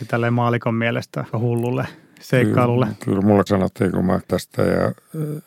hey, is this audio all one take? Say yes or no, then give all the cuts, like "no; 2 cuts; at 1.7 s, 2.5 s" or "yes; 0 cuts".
no; 3 cuts; at 1.3 s, 3.5 s, 4.3 s